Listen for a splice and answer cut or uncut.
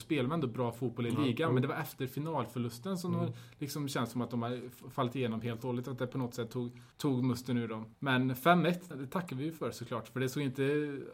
cut